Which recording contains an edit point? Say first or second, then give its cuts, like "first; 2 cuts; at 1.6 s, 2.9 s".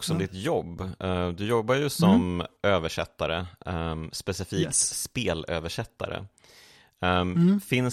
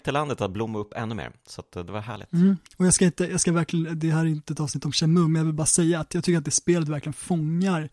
second; 1 cut; at 2.7 s